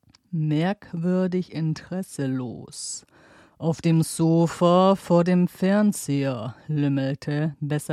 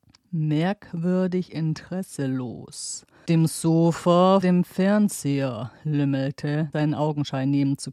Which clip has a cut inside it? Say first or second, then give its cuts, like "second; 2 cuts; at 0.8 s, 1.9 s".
second; 3 cuts; at 3.3 s, 4.4 s, 6.7 s